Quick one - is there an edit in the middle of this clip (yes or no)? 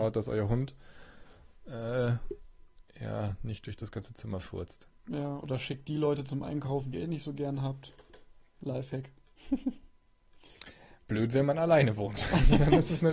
yes